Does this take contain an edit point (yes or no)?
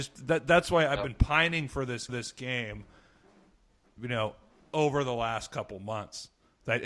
yes